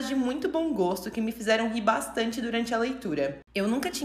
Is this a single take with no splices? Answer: yes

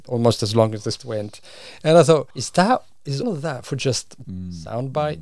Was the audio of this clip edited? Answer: yes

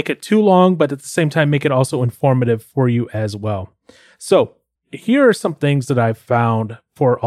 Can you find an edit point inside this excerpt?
no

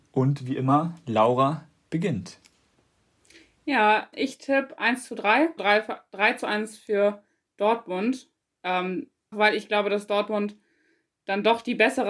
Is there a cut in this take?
yes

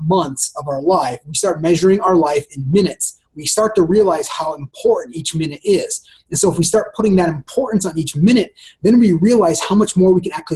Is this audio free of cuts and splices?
yes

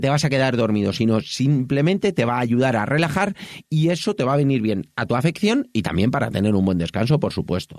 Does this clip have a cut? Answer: no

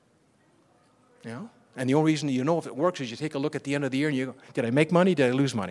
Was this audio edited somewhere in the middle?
no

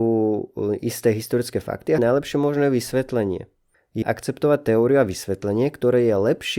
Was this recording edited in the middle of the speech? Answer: yes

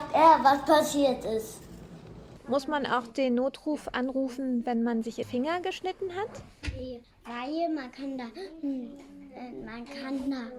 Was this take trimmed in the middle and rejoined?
yes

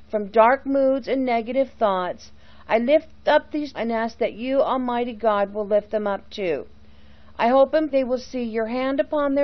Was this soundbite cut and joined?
yes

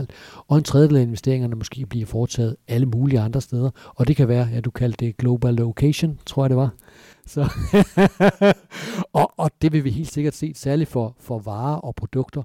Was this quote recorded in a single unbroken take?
yes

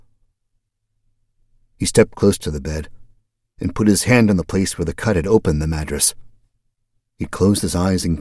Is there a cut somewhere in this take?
no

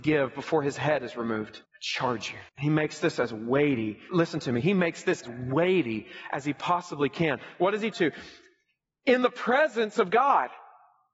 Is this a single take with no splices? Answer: no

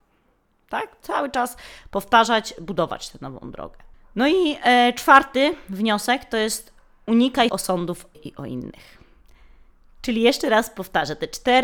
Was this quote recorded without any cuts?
no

